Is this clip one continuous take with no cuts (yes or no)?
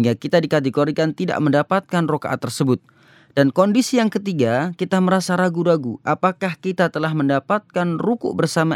yes